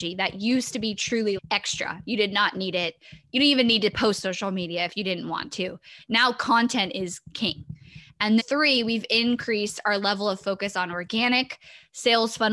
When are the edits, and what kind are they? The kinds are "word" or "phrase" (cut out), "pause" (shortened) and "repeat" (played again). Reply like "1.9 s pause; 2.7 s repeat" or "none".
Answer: 1.4 s word; 4.2 s word; 8.4 s word